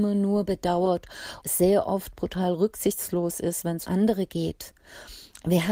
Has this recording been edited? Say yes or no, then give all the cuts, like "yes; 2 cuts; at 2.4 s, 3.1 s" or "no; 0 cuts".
yes; 2 cuts; at 1.4 s, 3.9 s